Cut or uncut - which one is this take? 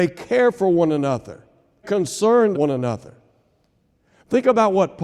cut